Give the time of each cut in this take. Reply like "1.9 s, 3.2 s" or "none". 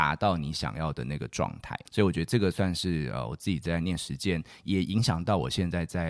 1.9 s